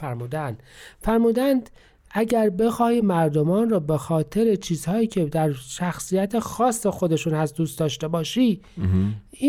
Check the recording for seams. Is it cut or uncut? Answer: uncut